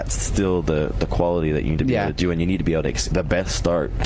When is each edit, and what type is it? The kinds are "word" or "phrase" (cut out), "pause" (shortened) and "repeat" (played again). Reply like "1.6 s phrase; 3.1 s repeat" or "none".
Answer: 1.8 s word; 3.1 s word